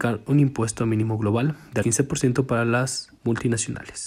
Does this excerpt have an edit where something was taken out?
yes; 2 cuts; at 1.8 s, 3.2 s

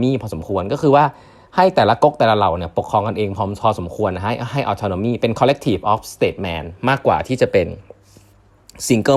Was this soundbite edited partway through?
no; 0 cuts

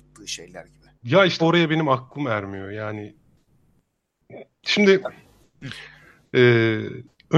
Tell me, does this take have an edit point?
yes; 2 cuts; at 0.9 s, 1.4 s

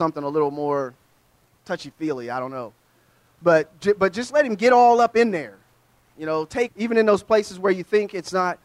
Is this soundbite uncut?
no; 1 cut; at 6.7 s

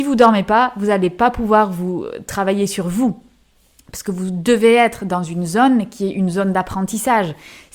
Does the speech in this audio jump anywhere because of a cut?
no; 0 cuts

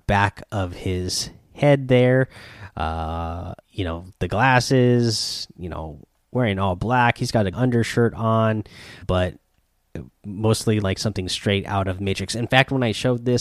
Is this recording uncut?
no; 6 cuts; at 3.6 s, 4.2 s, 6.1 s, 7.5 s, 9.0 s, 10.8 s

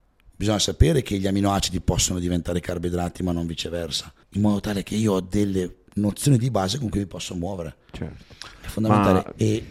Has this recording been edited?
yes; 1 cut; at 4.2 s

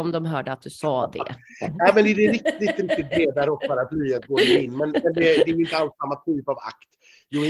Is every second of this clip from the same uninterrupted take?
yes; 0 cuts

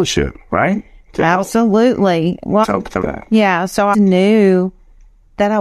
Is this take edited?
yes; 3 cuts; at 2.6 s, 3.0 s, 3.9 s

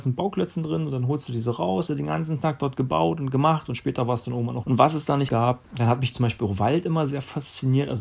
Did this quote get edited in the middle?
yes; 5 cuts; at 1.9 s, 4.6 s, 5.3 s, 5.7 s, 6.1 s

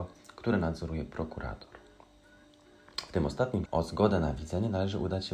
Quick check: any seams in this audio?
yes; 1 cut; at 3.7 s

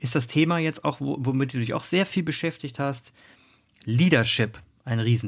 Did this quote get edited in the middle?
no; 0 cuts

